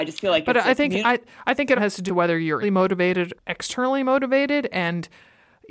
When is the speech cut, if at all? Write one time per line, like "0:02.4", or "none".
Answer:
0:01.8
0:02.1
0:02.6
0:03.3